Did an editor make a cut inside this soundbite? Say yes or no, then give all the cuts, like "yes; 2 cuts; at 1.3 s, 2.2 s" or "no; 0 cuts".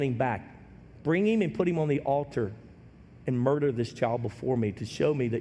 no; 0 cuts